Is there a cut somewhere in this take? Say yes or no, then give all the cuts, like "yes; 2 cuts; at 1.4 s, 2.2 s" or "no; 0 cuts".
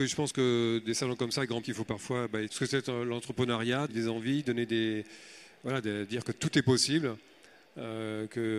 yes; 3 cuts; at 1.6 s, 2.5 s, 3.9 s